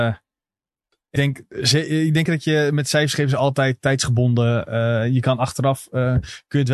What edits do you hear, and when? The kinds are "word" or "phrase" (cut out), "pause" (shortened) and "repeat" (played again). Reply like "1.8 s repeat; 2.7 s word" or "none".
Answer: 1.2 s word; 2.3 s word